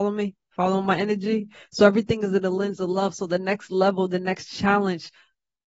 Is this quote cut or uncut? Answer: uncut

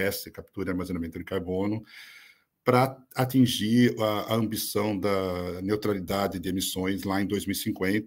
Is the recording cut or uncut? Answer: uncut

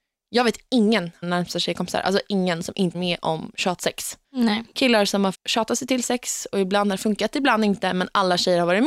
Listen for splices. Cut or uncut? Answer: cut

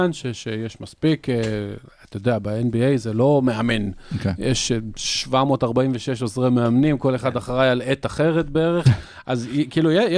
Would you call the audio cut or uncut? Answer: uncut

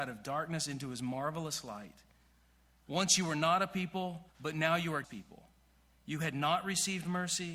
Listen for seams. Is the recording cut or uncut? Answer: cut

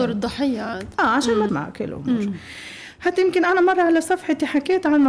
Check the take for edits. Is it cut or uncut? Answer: cut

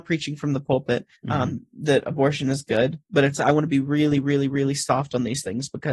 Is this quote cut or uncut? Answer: cut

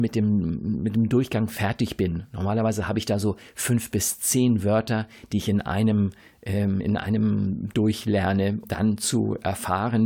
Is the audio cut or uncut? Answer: cut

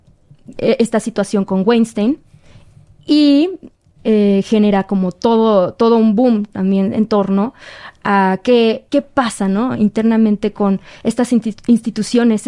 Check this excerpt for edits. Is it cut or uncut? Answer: cut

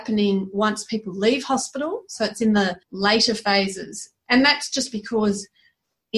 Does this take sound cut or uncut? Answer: cut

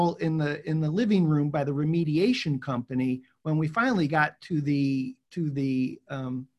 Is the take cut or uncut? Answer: cut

